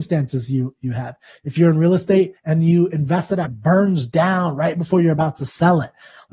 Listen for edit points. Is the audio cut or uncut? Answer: cut